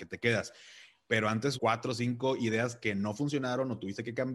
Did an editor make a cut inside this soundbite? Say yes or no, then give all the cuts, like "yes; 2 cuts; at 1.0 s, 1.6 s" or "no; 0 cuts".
yes; 1 cut; at 1.5 s